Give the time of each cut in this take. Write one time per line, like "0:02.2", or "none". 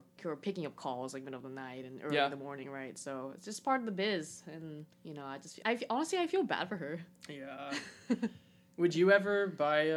0:04.9
0:05.6